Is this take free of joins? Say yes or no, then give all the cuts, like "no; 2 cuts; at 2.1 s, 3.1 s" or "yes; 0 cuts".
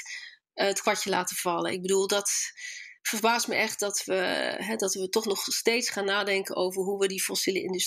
no; 1 cut; at 3.0 s